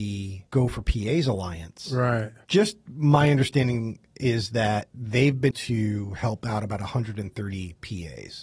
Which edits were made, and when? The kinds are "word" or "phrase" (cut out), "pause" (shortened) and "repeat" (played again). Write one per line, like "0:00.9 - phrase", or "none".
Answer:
0:05.5 - word